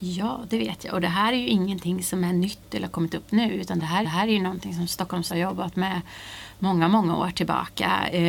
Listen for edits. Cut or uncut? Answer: cut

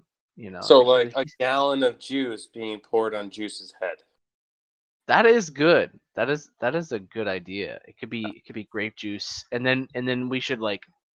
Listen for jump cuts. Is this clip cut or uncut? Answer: uncut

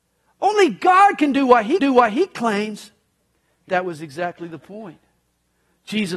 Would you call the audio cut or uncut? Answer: cut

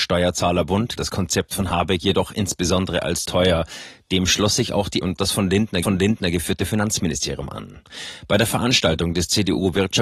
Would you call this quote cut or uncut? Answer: cut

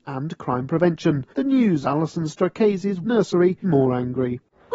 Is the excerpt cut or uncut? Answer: cut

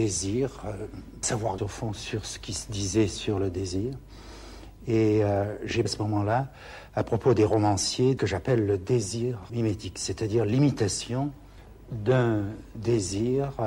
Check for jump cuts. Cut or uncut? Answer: cut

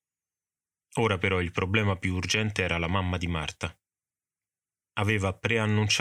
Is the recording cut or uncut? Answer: uncut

